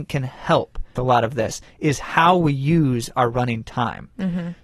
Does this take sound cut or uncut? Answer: cut